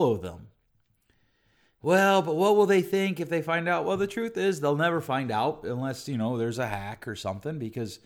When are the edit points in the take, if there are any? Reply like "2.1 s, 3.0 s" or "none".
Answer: none